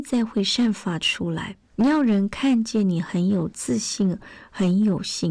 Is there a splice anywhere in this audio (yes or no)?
yes